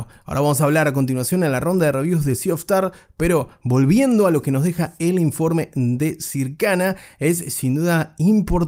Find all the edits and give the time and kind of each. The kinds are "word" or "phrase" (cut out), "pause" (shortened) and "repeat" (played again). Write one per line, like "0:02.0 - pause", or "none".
none